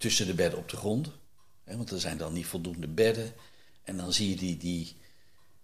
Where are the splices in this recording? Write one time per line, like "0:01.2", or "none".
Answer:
none